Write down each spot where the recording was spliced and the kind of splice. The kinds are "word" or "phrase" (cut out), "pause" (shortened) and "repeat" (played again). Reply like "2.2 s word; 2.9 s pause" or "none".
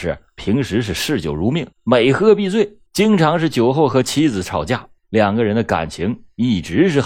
1.7 s pause; 2.9 s pause; 5.0 s pause